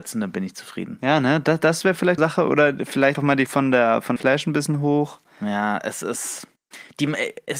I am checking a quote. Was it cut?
yes; 4 cuts; at 2.2 s, 3.1 s, 3.5 s, 4.2 s

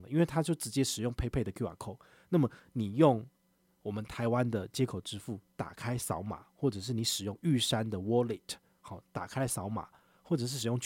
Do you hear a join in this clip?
no; 0 cuts

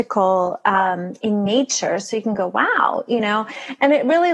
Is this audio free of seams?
yes; 0 cuts

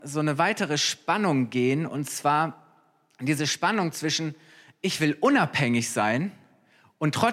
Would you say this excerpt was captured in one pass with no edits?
yes; 0 cuts

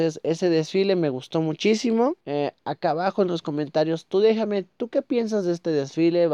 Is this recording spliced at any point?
yes; 1 cut; at 2.2 s

